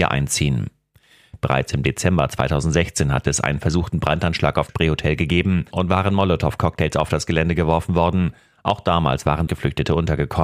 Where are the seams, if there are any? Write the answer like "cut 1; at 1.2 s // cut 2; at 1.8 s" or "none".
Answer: cut 1; at 4.7 s // cut 2; at 9.5 s